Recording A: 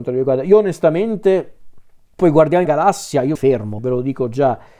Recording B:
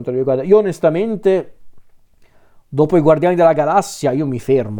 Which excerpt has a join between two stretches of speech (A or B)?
A